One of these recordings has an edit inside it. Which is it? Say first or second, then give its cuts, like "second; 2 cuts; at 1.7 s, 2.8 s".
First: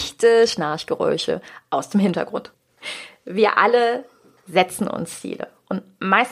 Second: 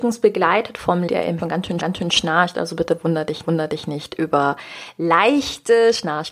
second; 4 cuts; at 1.1 s, 1.4 s, 1.8 s, 3.4 s